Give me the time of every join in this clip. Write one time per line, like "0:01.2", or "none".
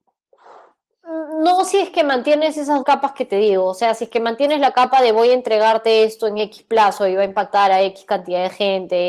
0:02.8